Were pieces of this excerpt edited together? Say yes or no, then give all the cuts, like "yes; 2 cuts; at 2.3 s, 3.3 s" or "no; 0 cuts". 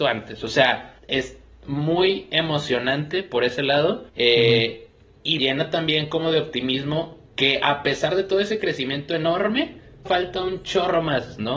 yes; 5 cuts; at 1.0 s, 4.1 s, 5.4 s, 7.3 s, 10.1 s